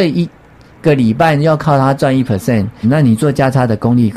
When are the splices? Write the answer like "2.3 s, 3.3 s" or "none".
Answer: 2.8 s